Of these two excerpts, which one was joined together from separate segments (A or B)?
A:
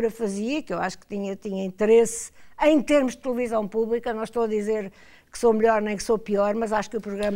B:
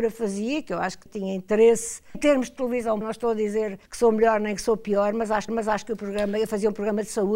B